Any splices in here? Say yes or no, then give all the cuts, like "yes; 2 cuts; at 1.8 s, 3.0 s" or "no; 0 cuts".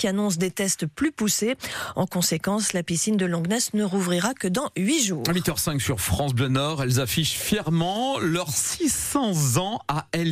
no; 0 cuts